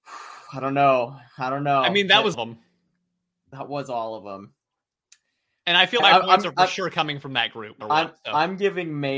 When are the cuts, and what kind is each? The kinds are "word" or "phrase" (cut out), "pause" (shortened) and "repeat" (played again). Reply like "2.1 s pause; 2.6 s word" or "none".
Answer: 2.3 s word; 6.0 s word; 7.8 s word